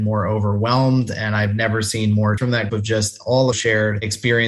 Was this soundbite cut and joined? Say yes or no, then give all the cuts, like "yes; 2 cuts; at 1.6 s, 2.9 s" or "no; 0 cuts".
yes; 3 cuts; at 2.4 s, 2.7 s, 3.5 s